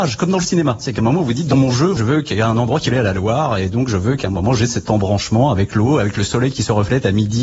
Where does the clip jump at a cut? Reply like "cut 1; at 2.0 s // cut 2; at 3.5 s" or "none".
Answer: cut 1; at 2.9 s